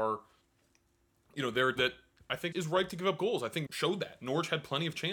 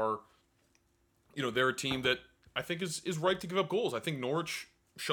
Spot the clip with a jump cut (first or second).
first